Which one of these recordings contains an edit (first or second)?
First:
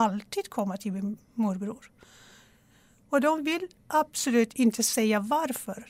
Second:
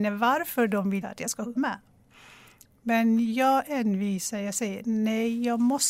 second